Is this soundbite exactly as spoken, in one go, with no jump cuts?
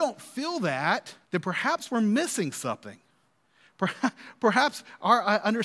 no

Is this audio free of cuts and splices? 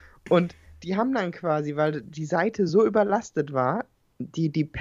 yes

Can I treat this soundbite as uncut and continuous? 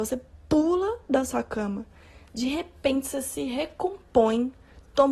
yes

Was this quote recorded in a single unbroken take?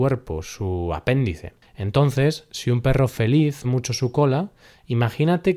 no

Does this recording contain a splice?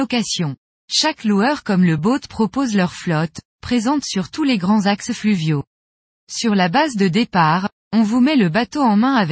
no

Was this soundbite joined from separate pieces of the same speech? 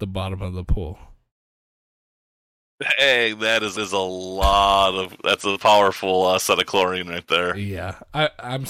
yes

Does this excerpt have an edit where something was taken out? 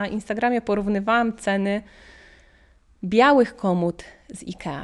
no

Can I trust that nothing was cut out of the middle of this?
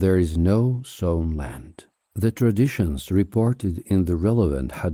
yes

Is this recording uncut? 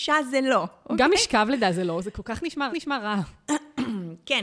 no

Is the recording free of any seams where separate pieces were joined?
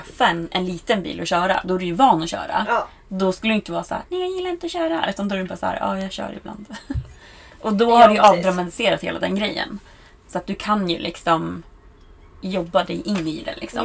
yes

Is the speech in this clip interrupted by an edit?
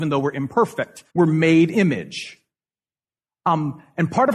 yes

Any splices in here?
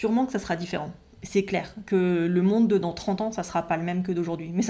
no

